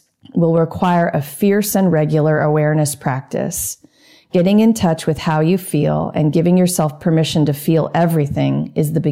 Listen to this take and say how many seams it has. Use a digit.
0